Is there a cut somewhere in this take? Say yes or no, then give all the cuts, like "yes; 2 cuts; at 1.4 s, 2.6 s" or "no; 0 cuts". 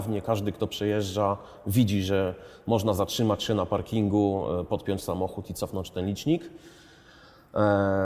no; 0 cuts